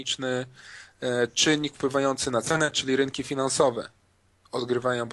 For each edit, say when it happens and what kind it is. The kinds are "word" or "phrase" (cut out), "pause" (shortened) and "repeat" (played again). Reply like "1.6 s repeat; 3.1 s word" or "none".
none